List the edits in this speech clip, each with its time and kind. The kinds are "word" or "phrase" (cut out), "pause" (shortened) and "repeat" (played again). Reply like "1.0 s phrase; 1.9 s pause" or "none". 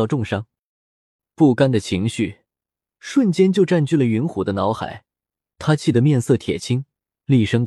none